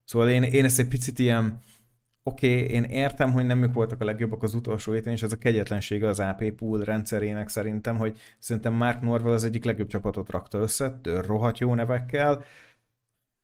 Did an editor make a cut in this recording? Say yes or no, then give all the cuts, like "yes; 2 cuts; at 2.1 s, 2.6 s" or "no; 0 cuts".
no; 0 cuts